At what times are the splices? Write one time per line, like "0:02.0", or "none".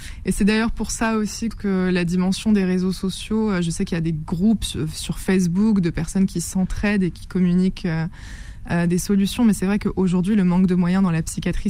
0:01.5